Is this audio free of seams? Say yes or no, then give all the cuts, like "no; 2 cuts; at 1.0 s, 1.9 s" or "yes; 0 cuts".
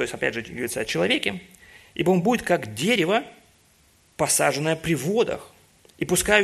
yes; 0 cuts